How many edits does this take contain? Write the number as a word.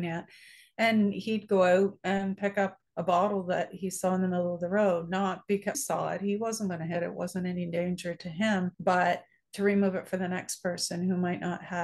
three